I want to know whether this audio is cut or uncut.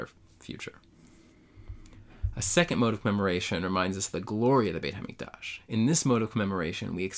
uncut